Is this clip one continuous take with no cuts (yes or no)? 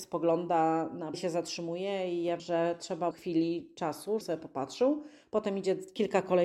no